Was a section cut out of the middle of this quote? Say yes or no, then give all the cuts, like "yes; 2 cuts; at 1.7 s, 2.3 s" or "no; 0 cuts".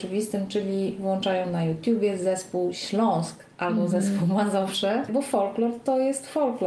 no; 0 cuts